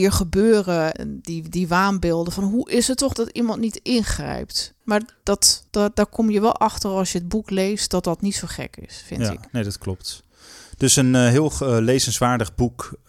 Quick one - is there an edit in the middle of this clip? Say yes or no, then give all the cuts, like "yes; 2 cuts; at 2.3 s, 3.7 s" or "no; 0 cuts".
yes; 5 cuts; at 0.9 s, 3.1 s, 4.8 s, 5.7 s, 9.5 s